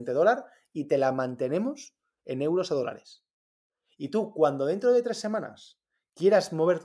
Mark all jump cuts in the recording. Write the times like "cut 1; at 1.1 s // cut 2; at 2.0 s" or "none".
none